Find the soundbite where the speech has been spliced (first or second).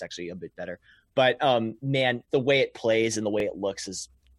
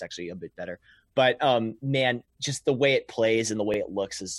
first